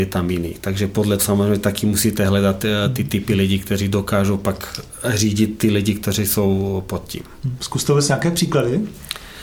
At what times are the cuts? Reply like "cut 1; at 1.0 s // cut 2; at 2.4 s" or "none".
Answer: cut 1; at 1.2 s

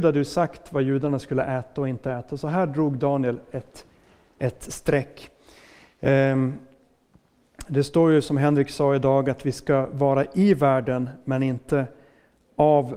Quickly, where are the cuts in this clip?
none

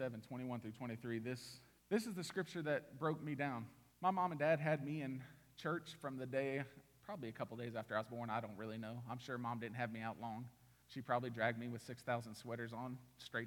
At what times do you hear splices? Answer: cut 1; at 1.8 s // cut 2; at 3.9 s // cut 3; at 10.8 s

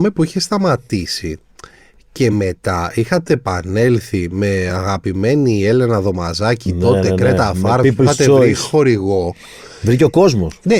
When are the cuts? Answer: none

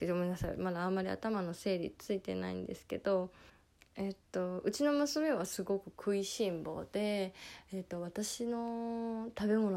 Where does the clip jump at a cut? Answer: cut 1; at 3.5 s

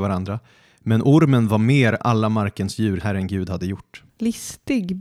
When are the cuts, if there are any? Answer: cut 1; at 2.0 s // cut 2; at 3.0 s // cut 3; at 4.1 s

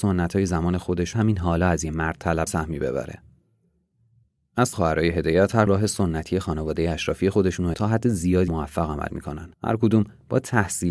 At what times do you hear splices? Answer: cut 1; at 1.1 s // cut 2; at 2.5 s // cut 3; at 4.7 s // cut 4; at 5.7 s // cut 5; at 7.7 s // cut 6; at 8.5 s // cut 7; at 9.5 s

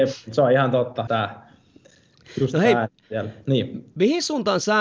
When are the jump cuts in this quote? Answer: cut 1; at 1.1 s

